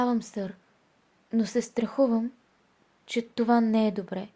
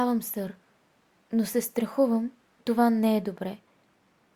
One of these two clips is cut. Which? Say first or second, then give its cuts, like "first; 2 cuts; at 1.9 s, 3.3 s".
second; 1 cut; at 2.6 s